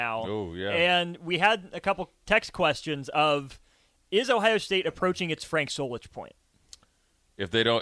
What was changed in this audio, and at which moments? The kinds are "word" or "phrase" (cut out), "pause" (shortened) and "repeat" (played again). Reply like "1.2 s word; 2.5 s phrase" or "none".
none